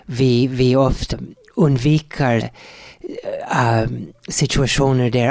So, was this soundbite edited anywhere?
yes; 2 cuts; at 1.1 s, 2.4 s

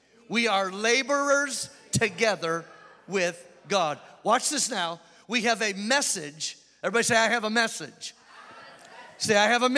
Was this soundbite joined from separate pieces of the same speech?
no; 0 cuts

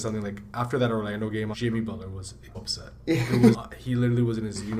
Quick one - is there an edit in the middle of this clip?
yes; 3 cuts; at 1.5 s, 2.5 s, 3.5 s

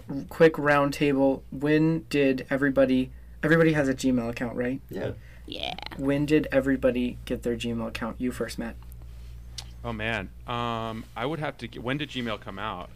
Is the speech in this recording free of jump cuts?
no; 1 cut; at 1.5 s

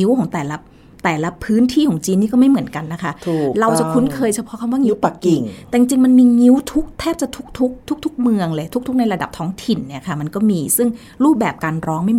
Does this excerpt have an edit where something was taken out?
yes; 1 cut; at 7.8 s

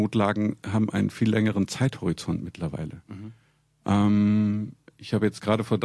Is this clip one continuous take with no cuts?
yes; 0 cuts

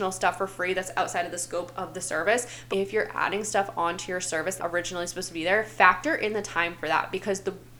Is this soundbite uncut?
no; 2 cuts; at 2.7 s, 4.6 s

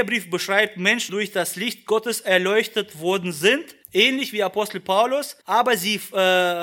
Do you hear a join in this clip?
yes; 3 cuts; at 1.1 s, 3.8 s, 5.4 s

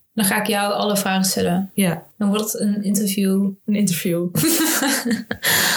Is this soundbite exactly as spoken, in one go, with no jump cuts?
no; 1 cut; at 2.1 s

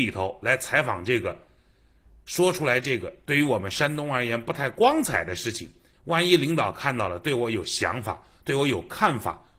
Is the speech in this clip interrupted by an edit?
no; 0 cuts

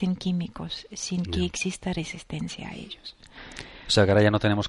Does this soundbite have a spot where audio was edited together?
no; 0 cuts

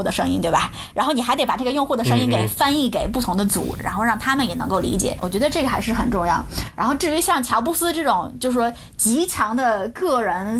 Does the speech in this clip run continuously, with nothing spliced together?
no; 1 cut; at 5.2 s

